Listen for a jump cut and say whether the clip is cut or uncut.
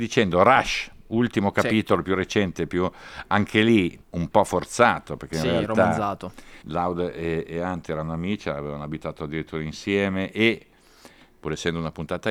cut